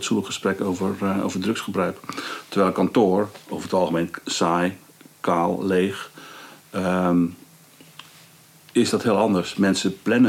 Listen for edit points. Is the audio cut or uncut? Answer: uncut